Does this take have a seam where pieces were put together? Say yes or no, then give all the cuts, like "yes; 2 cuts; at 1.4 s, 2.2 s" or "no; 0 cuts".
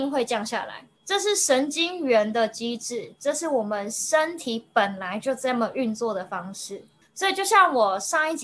yes; 2 cuts; at 1.0 s, 7.0 s